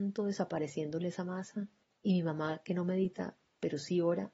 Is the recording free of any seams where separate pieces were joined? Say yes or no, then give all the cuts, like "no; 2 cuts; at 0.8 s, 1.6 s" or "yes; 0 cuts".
no; 1 cut; at 1.8 s